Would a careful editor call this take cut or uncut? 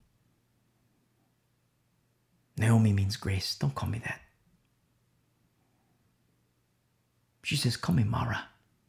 uncut